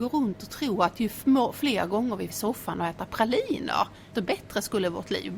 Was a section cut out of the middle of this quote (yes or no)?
yes